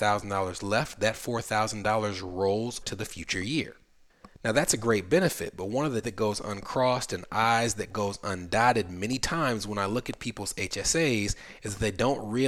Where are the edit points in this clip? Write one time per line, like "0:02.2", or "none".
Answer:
0:02.8
0:06.0

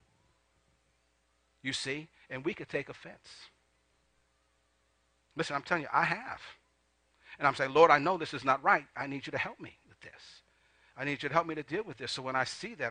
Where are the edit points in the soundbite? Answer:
none

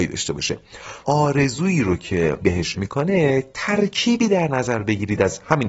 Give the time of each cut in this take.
0:01.0
0:02.4
0:02.7

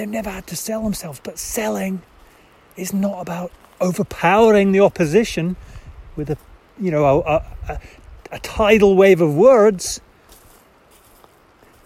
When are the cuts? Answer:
none

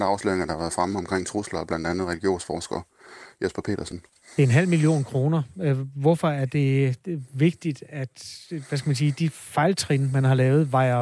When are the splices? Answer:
0:04.2

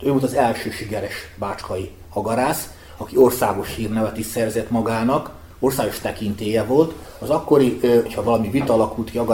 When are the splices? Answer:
0:08.1

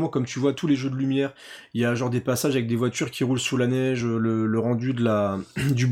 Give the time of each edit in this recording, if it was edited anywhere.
none

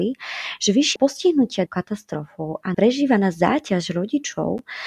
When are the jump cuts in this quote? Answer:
0:01.0
0:01.7
0:02.7

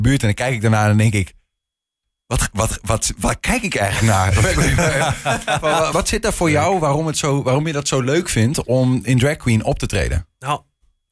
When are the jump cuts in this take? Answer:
0:05.9

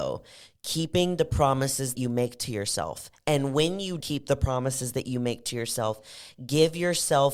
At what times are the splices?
0:01.9
0:04.0

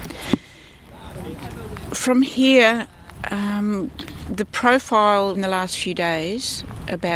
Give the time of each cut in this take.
0:05.4

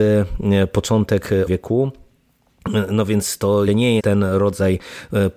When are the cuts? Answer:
0:01.5
0:03.7
0:04.0

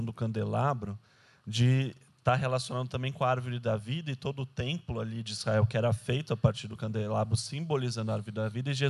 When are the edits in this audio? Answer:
none

